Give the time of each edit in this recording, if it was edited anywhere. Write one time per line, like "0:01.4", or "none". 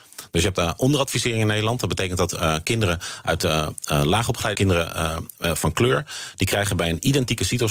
0:04.5